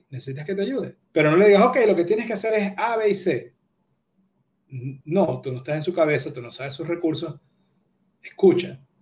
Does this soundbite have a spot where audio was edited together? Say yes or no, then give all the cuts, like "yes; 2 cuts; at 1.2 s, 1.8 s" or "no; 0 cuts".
yes; 2 cuts; at 1.1 s, 5.0 s